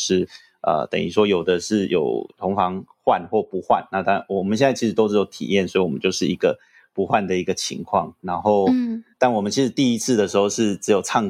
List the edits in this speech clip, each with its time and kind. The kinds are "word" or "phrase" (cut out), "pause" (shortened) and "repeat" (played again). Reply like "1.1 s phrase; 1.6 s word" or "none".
none